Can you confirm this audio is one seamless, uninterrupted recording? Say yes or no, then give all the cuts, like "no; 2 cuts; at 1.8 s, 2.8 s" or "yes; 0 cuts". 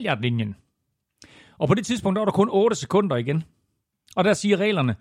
yes; 0 cuts